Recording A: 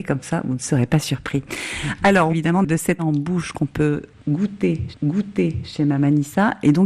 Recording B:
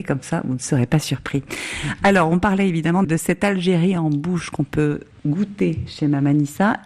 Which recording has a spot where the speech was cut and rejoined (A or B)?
A